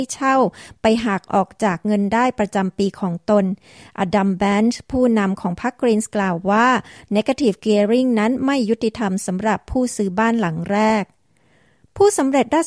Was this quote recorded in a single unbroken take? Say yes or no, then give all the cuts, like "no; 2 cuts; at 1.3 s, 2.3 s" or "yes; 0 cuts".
yes; 0 cuts